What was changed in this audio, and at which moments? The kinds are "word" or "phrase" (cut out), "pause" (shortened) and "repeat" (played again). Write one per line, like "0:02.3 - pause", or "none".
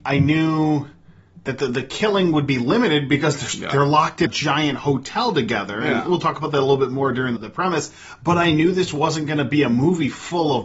0:04.3 - word
0:07.4 - word